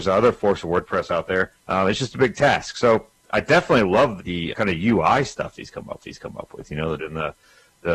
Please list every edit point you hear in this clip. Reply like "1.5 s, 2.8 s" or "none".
1.6 s, 4.2 s, 4.5 s, 6.0 s, 7.0 s